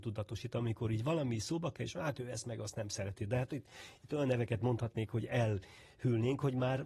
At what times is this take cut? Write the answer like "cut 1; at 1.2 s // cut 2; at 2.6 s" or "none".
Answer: none